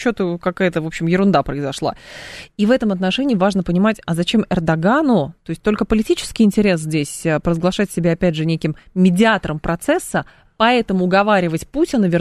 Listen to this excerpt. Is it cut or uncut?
uncut